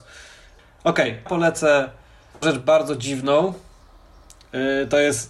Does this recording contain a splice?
yes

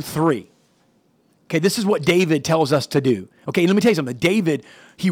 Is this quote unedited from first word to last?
yes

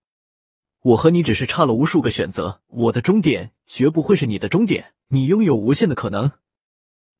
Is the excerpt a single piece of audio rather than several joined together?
no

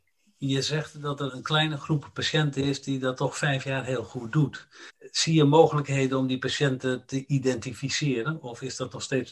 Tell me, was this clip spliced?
yes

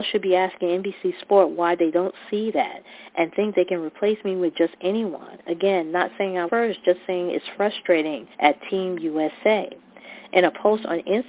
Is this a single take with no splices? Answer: no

